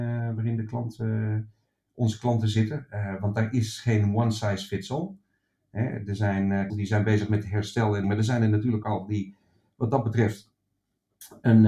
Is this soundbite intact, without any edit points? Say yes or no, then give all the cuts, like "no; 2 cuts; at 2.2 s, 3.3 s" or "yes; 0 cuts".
no; 3 cuts; at 6.7 s, 8.0 s, 8.8 s